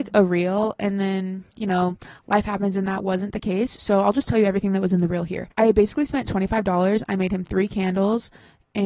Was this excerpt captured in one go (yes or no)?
no